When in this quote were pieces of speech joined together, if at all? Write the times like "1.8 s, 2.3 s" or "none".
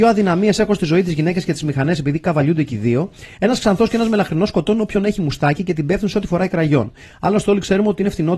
none